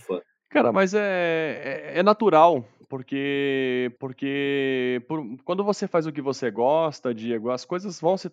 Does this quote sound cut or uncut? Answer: cut